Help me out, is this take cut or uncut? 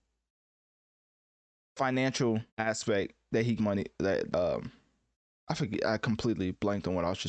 cut